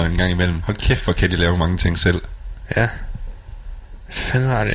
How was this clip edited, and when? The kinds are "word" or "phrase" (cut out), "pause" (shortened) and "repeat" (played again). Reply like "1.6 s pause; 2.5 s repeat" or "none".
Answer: none